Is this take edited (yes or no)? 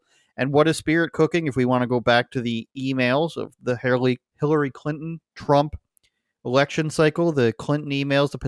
no